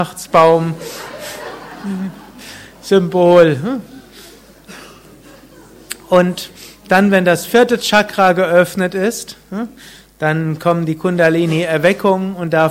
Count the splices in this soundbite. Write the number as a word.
zero